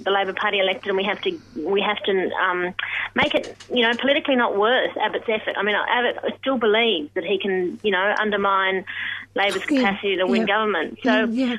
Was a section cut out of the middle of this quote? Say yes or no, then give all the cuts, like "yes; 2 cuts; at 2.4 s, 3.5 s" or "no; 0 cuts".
no; 0 cuts